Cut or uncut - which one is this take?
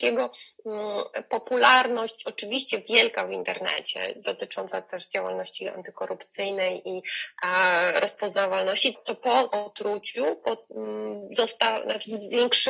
cut